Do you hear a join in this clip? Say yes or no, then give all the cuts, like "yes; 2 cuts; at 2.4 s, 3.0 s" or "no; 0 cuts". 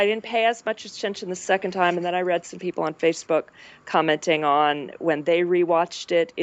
no; 0 cuts